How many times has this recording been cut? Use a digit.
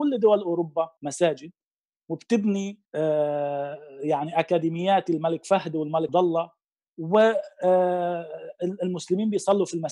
3